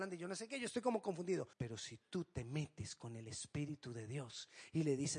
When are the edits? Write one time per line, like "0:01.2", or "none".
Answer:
0:01.5